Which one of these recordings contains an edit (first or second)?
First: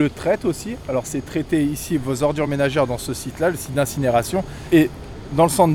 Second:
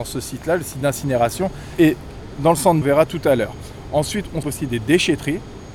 second